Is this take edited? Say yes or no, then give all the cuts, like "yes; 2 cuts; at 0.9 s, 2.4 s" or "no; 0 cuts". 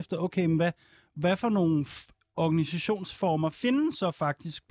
no; 0 cuts